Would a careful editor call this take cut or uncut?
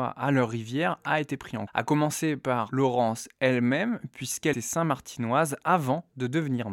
cut